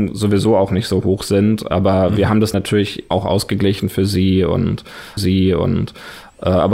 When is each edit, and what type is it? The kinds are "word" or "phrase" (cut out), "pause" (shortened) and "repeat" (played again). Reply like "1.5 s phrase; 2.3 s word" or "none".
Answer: 2.5 s word; 3.1 s word; 5.2 s repeat